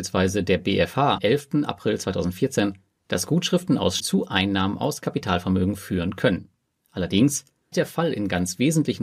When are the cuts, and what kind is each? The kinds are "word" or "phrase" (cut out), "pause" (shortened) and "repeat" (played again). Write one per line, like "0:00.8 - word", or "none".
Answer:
0:01.2 - word
0:04.0 - word
0:07.7 - word